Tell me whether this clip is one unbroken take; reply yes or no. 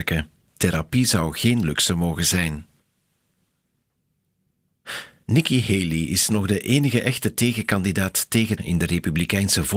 no